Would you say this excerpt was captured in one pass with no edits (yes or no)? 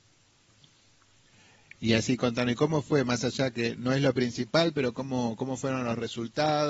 yes